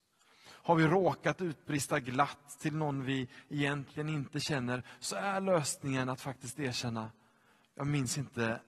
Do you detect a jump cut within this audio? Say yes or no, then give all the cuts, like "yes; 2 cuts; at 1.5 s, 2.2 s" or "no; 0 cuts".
no; 0 cuts